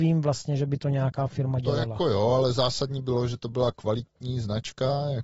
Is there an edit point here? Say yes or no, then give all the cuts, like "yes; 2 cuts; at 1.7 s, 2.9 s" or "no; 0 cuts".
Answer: no; 0 cuts